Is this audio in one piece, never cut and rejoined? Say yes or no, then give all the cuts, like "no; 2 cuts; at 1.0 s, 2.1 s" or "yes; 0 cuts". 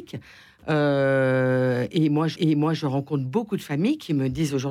no; 1 cut; at 2.3 s